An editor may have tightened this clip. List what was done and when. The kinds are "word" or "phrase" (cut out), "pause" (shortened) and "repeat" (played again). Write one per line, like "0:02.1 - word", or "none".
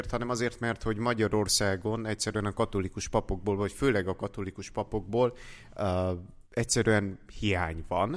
0:06.5 - pause